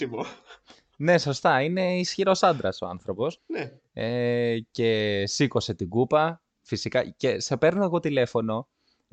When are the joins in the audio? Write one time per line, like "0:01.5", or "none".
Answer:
0:03.4
0:06.5